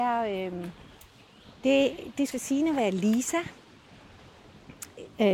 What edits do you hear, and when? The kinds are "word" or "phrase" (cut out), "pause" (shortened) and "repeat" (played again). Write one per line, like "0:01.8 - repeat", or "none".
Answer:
0:02.3 - phrase